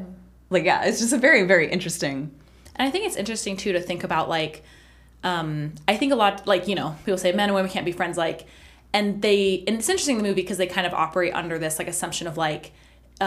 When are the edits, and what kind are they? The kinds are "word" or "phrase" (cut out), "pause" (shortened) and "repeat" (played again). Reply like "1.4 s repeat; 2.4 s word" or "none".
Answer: none